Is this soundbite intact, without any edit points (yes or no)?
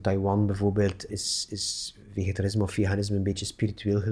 no